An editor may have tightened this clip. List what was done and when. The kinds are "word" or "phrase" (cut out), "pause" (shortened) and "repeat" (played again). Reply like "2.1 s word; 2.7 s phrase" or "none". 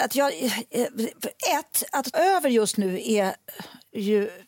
2.1 s word